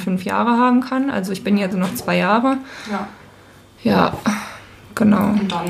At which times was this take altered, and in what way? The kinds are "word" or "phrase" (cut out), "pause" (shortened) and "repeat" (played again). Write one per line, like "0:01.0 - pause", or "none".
0:01.7 - phrase